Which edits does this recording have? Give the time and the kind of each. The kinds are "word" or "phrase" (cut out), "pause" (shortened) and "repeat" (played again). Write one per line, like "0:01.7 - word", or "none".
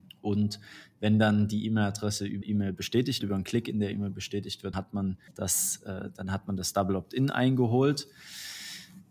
0:02.4 - word
0:03.2 - word
0:04.7 - word
0:05.3 - pause